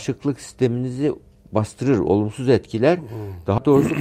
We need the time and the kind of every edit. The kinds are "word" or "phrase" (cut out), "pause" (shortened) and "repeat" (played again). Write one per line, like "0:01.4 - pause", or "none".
none

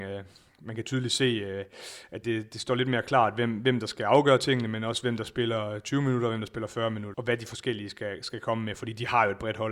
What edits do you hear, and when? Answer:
0:02.2 - word
0:07.1 - word

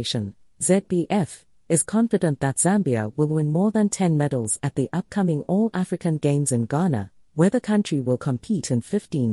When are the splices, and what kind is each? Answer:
none

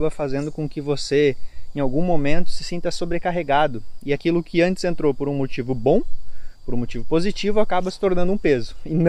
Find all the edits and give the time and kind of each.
none

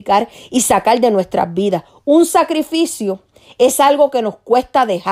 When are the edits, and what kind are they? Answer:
none

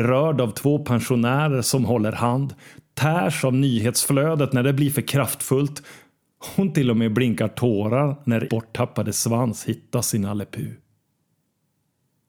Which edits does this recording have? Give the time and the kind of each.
0:08.5 - word

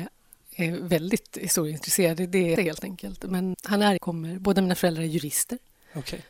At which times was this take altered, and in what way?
0:02.6 - phrase
0:03.5 - word
0:04.0 - phrase

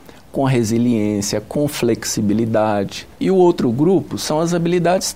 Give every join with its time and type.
0:03.1 - pause

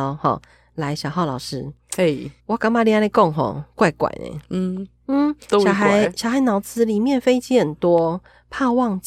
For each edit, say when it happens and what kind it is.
0:02.4 - pause

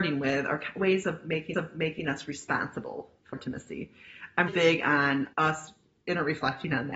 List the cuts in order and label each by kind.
0:01.5 - repeat
0:03.3 - word
0:04.5 - word
0:05.3 - pause

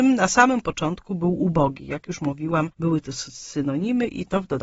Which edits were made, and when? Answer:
none

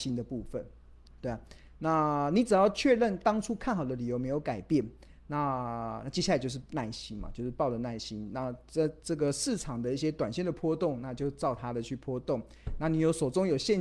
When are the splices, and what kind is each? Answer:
0:01.0 - pause

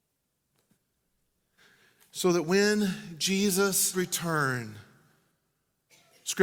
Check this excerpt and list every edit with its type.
0:03.9 - word

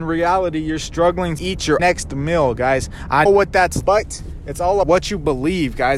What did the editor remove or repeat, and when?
0:01.4 - word
0:01.8 - word
0:03.3 - word
0:03.8 - word
0:04.8 - word

